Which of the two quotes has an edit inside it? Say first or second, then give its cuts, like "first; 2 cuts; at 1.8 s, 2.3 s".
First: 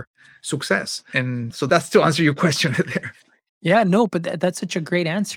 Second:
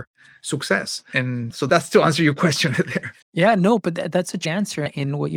second; 2 cuts; at 3.2 s, 4.4 s